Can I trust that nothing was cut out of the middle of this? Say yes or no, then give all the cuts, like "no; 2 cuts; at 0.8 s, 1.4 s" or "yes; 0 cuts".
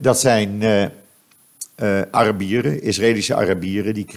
no; 1 cut; at 1.7 s